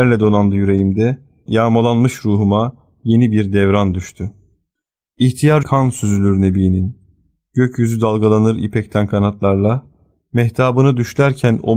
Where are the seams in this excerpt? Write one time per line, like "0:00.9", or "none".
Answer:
0:05.6

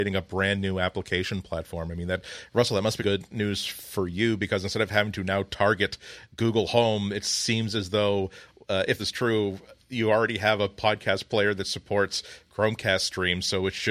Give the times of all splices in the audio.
0:03.0
0:09.0

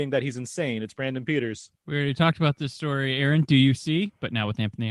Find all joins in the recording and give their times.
0:01.8

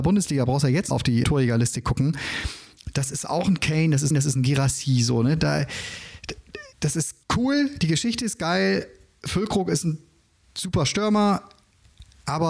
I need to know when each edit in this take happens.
0:00.9
0:01.2
0:04.1
0:06.7
0:07.2

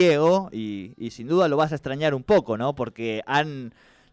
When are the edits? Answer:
none

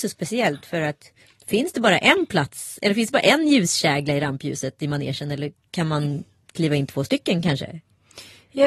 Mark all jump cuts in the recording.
0:01.2

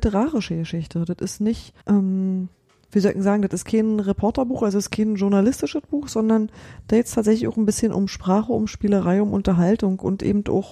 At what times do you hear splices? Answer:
0:01.8

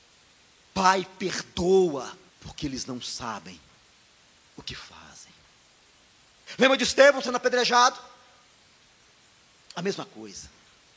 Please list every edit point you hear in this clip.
0:02.3

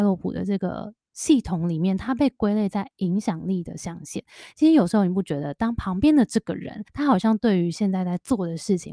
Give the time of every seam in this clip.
0:06.9

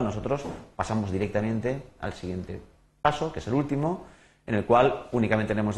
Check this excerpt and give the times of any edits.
none

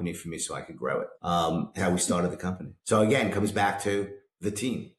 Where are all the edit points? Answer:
0:01.1
0:01.8
0:02.8

